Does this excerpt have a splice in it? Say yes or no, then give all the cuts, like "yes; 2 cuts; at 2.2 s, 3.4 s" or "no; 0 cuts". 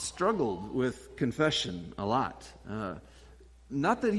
no; 0 cuts